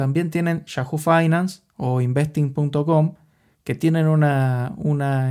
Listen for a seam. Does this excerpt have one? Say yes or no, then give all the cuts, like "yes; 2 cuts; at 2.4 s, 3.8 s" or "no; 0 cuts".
no; 0 cuts